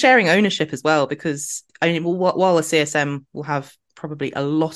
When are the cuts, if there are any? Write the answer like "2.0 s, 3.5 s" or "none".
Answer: 1.7 s